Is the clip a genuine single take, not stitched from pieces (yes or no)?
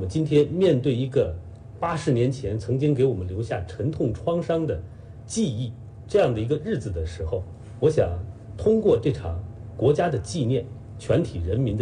yes